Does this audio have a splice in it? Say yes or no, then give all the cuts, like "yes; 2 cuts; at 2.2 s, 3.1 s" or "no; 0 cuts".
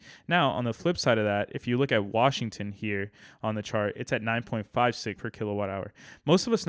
yes; 1 cut; at 5.2 s